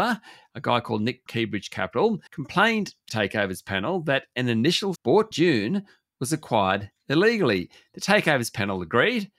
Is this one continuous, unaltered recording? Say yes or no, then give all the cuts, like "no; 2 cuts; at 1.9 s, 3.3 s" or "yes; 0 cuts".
no; 5 cuts; at 1.3 s, 2.3 s, 3.1 s, 5.0 s, 5.3 s